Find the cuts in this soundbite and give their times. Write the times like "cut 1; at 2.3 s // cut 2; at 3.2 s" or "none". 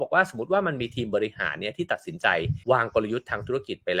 cut 1; at 2.6 s